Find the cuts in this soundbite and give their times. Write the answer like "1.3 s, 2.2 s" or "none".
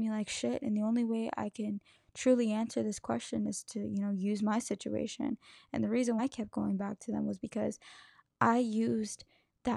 6.2 s